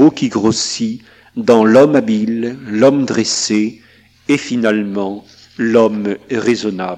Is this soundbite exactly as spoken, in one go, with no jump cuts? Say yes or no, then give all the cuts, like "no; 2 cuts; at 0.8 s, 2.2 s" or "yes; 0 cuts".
yes; 0 cuts